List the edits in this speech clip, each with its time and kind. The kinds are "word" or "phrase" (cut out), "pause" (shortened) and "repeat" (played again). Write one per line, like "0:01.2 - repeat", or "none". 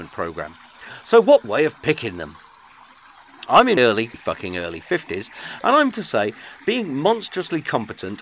0:01.4 - word
0:03.8 - word
0:04.1 - word
0:05.9 - word
0:06.6 - word